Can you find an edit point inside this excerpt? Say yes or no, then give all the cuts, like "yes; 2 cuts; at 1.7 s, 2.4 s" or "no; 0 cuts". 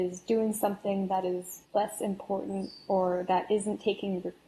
yes; 1 cut; at 1.6 s